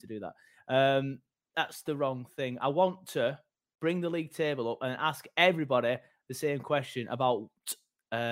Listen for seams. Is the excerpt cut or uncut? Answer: uncut